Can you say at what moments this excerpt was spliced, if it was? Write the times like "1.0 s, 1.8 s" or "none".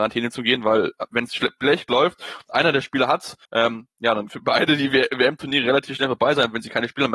3.4 s, 4.3 s